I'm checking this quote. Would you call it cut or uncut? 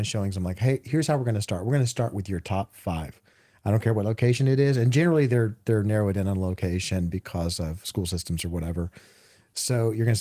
uncut